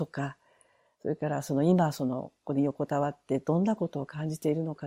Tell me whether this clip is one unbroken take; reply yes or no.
yes